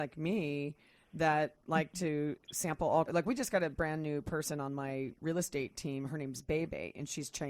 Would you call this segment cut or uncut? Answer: cut